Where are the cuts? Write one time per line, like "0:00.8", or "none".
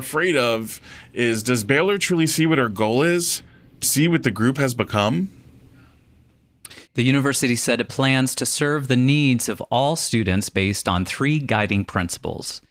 0:03.8
0:06.9